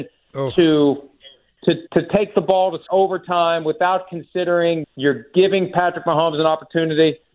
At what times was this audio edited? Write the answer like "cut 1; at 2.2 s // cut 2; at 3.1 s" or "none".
cut 1; at 1.9 s // cut 2; at 2.9 s // cut 3; at 4.8 s